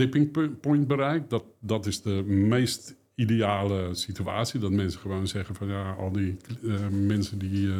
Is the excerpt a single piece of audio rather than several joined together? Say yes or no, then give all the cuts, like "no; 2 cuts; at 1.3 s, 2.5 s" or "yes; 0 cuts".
yes; 0 cuts